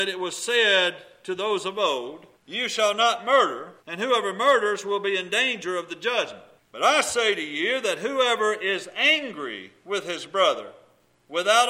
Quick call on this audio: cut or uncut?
cut